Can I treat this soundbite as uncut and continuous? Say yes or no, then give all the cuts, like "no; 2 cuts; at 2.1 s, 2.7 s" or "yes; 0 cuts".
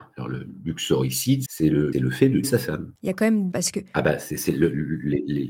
no; 5 cuts; at 1.5 s, 1.9 s, 2.4 s, 3.0 s, 3.5 s